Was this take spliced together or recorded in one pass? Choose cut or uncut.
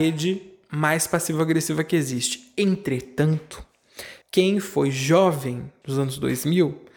cut